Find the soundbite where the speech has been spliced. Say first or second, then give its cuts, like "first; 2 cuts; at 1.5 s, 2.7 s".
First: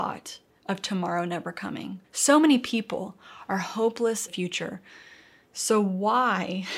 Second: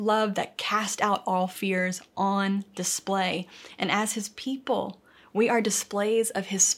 first; 2 cuts; at 2.0 s, 4.3 s